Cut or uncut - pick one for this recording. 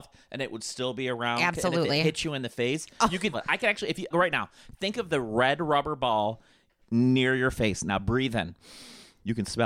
cut